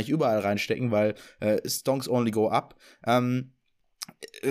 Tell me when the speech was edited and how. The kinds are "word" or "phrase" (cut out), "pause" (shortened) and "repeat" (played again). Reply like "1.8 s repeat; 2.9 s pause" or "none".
none